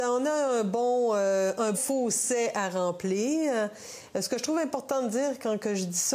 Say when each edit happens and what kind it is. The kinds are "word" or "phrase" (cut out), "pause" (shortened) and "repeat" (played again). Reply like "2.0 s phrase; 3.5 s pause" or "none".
1.7 s word